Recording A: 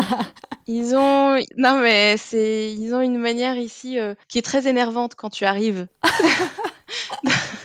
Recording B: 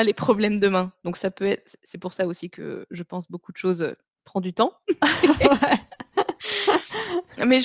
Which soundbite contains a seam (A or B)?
A